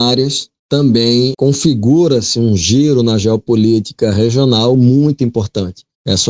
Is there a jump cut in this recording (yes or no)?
no